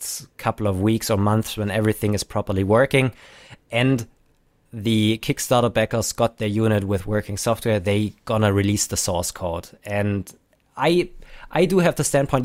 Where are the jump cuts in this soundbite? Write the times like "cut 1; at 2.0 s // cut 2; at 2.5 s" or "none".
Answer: none